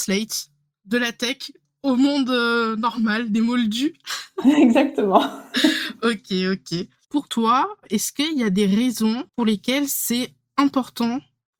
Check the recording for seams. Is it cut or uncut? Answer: cut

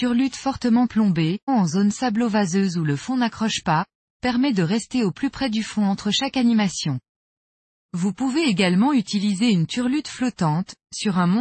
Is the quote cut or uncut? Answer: cut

